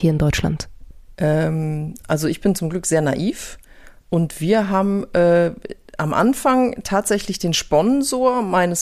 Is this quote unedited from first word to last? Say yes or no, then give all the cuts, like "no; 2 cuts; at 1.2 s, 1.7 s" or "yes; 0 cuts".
yes; 0 cuts